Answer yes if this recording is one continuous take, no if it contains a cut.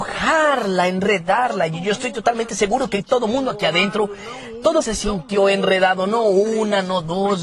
no